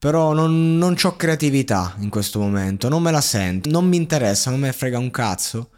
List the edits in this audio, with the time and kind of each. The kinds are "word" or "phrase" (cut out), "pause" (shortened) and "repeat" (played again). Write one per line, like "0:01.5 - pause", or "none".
0:03.6 - word